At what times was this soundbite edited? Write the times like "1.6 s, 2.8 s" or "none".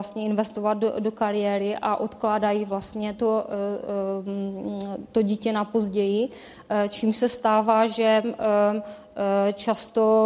none